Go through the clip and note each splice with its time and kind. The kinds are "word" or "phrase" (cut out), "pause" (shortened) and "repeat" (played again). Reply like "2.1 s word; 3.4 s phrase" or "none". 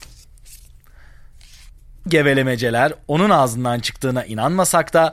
2.1 s word